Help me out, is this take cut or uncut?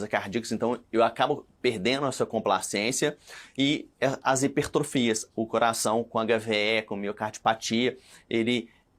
cut